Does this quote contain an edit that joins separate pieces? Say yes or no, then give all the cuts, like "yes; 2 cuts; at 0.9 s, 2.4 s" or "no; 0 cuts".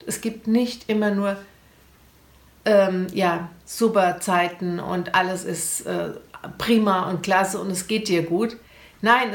no; 0 cuts